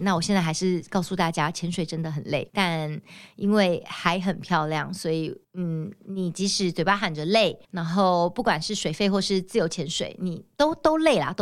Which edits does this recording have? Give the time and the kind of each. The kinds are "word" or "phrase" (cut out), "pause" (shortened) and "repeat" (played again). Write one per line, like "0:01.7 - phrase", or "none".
0:02.5 - pause
0:05.4 - pause
0:07.6 - pause